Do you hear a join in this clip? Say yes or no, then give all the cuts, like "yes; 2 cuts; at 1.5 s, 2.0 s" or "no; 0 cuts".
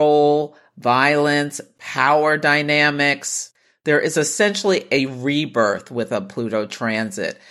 no; 0 cuts